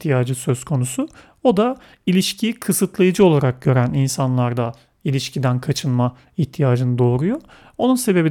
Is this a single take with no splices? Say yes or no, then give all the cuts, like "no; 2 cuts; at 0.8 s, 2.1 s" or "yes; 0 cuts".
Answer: yes; 0 cuts